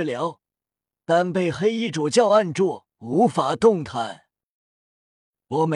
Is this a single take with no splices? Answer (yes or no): no